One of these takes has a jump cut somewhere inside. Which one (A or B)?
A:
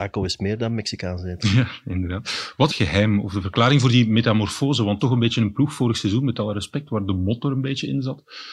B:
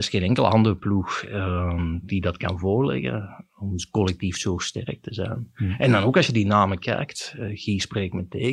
A